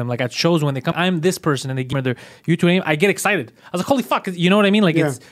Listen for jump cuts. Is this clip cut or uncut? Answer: cut